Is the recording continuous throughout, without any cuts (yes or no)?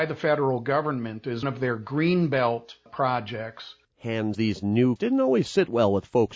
no